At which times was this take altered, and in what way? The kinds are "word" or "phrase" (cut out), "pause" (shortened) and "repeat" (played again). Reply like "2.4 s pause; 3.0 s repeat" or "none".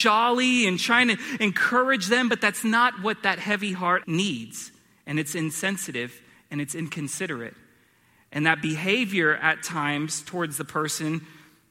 4.0 s word